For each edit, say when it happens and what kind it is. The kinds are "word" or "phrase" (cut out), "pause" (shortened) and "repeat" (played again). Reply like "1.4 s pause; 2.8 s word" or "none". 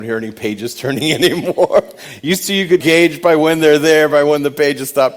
2.8 s word